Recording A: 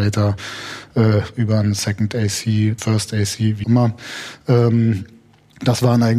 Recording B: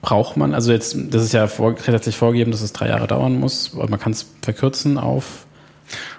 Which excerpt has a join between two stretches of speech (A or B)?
A